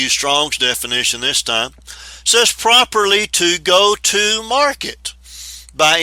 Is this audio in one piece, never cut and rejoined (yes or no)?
yes